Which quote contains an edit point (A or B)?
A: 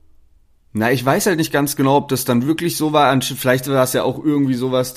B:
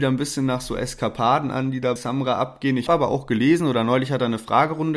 B